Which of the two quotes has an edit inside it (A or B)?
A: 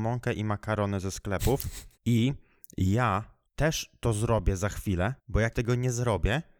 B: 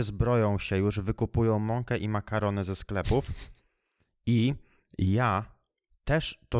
A